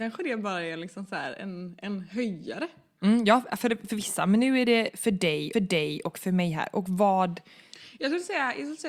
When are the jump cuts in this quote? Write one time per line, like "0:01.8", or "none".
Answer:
0:05.5